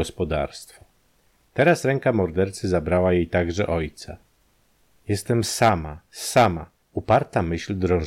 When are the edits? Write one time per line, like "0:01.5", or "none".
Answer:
none